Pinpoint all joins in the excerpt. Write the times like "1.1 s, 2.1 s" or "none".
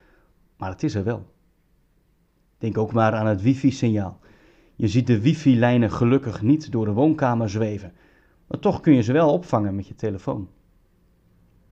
none